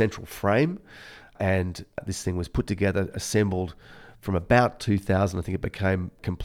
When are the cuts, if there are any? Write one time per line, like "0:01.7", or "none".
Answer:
none